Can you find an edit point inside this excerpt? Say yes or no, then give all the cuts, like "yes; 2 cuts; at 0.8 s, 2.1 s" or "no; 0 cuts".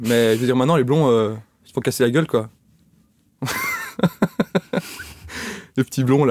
no; 0 cuts